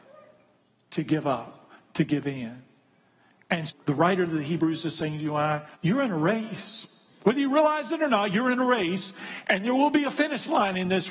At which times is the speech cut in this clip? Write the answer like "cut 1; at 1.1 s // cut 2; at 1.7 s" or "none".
cut 1; at 3.7 s // cut 2; at 5.7 s